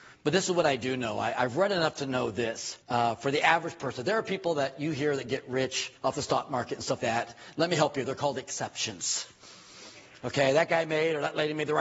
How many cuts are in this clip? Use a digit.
3